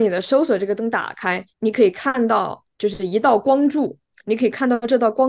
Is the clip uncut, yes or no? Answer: no